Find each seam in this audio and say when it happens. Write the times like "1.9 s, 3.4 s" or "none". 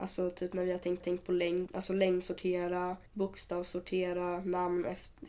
1.0 s, 1.7 s, 3.1 s